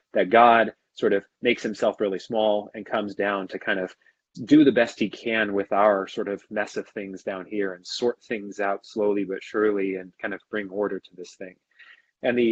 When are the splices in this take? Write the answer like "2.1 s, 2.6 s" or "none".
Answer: none